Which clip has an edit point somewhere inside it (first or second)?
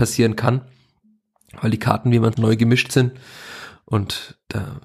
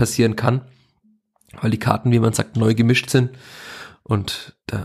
first